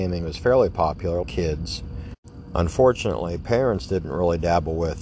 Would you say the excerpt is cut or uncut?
cut